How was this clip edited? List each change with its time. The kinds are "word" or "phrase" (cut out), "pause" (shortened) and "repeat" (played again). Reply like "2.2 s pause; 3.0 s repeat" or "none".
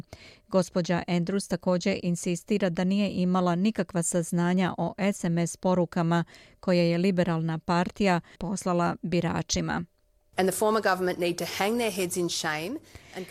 8.4 s word